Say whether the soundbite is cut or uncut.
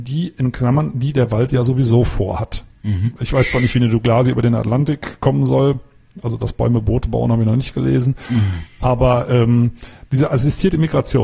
uncut